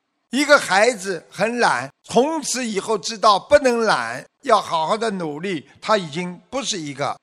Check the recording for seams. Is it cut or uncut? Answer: cut